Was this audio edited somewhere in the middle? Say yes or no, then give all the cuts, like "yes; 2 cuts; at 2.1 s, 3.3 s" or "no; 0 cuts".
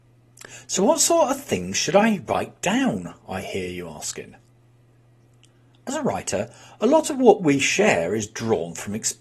no; 0 cuts